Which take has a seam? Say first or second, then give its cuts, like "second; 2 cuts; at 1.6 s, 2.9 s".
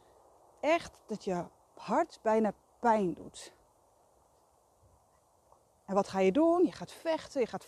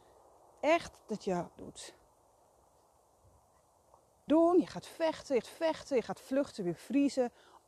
second; 3 cuts; at 1.6 s, 4.3 s, 5.4 s